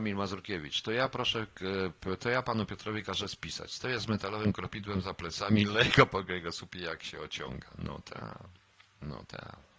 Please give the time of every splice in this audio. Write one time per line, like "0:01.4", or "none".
none